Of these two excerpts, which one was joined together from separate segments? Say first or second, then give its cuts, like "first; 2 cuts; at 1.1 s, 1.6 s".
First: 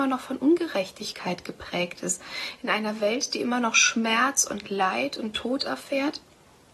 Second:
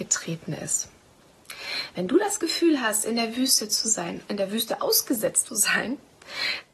second; 1 cut; at 5.5 s